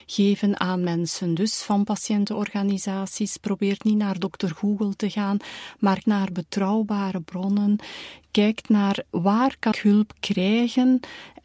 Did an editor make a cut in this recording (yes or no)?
yes